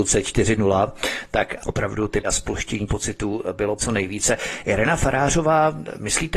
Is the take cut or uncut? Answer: cut